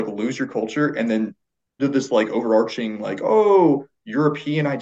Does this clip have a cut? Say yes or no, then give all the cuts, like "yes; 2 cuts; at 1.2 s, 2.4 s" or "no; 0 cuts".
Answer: yes; 1 cut; at 1.8 s